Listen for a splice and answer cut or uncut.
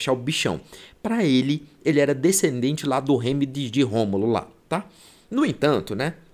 uncut